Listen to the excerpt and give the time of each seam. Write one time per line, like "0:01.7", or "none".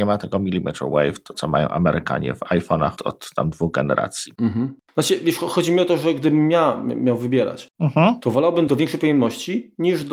0:03.0
0:04.8
0:08.7